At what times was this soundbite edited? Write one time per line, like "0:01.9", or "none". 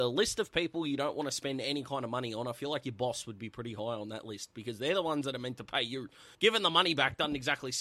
0:06.3